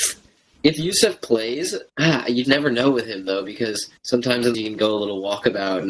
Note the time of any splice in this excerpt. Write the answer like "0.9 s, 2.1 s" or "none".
1.9 s, 2.4 s, 4.0 s, 4.5 s